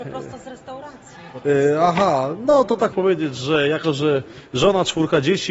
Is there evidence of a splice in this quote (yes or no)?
yes